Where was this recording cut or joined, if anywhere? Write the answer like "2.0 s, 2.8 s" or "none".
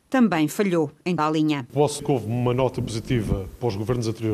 1.2 s, 2.0 s